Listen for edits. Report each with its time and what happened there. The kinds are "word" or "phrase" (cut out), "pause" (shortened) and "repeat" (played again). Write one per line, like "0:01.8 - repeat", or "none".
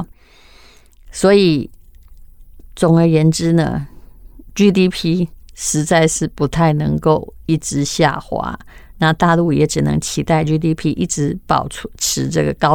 none